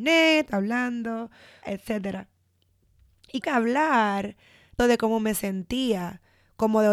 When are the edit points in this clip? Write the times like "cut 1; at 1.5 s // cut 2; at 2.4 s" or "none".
cut 1; at 1.6 s // cut 2; at 3.4 s // cut 3; at 4.8 s